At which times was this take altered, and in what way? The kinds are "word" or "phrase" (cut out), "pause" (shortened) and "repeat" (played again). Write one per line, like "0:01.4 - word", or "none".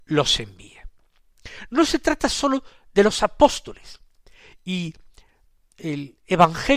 none